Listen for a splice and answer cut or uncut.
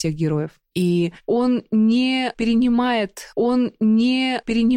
cut